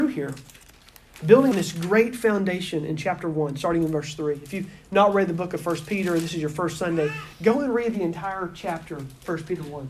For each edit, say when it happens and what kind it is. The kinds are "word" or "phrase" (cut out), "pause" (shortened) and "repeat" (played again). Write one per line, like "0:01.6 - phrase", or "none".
0:01.5 - word